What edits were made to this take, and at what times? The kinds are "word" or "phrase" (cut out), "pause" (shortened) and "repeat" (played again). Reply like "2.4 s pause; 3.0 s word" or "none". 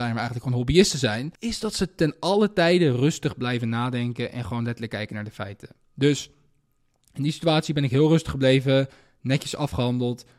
1.3 s pause